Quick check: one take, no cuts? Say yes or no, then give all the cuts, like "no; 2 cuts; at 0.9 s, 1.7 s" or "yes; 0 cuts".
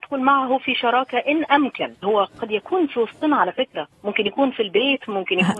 no; 2 cuts; at 2.0 s, 3.9 s